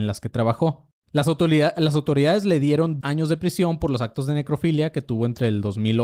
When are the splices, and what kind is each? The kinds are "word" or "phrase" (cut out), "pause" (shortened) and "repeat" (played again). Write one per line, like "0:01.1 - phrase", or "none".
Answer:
0:03.0 - word